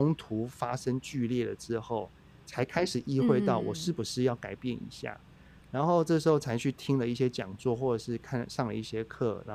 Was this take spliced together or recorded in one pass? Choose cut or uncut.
uncut